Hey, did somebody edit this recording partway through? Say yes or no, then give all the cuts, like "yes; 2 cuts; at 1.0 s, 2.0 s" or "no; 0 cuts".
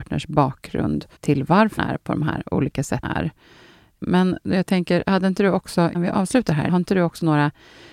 yes; 5 cuts; at 1.2 s, 1.8 s, 3.0 s, 5.9 s, 6.7 s